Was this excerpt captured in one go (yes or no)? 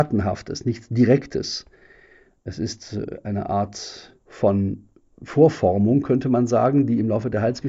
no